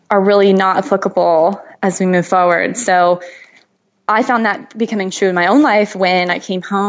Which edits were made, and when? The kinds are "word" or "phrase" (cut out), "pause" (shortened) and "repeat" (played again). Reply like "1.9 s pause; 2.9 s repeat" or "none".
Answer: none